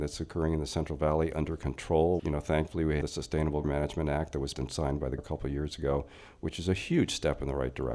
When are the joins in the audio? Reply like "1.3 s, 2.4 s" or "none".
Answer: 2.2 s, 3.0 s, 3.6 s, 4.5 s, 5.2 s

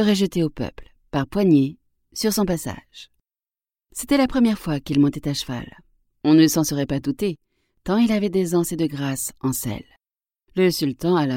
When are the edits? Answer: none

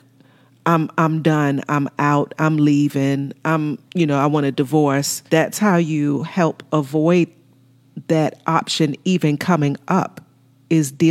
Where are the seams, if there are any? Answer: 3.8 s, 5.3 s

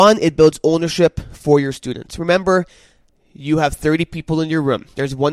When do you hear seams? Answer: none

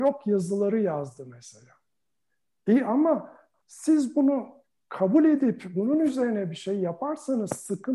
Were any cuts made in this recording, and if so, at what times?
none

